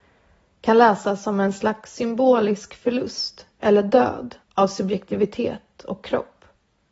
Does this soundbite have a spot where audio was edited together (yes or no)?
yes